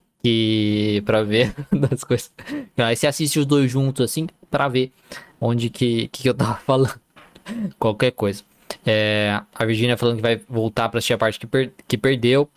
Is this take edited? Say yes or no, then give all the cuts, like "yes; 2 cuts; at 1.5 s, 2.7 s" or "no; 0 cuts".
no; 0 cuts